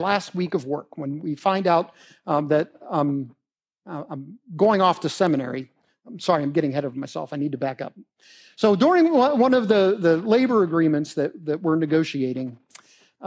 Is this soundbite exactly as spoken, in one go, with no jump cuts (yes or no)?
yes